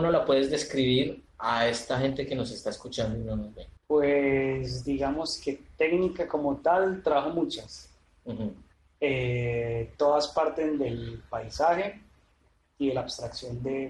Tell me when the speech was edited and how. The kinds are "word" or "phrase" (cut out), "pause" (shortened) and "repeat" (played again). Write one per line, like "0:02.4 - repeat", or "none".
0:01.3 - pause
0:03.8 - pause
0:08.7 - pause